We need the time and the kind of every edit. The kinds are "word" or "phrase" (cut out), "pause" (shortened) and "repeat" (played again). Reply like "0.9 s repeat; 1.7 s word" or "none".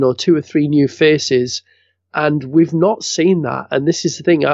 none